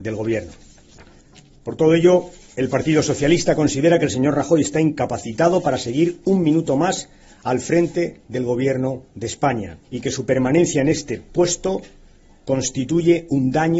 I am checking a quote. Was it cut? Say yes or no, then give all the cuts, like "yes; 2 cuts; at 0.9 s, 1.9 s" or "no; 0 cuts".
yes; 1 cut; at 9.8 s